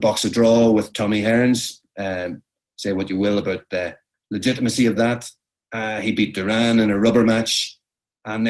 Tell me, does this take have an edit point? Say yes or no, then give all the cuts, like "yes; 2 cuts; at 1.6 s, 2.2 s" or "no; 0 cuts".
no; 0 cuts